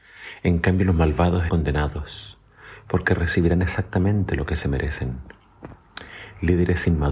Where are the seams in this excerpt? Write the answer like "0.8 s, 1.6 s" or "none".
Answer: 1.5 s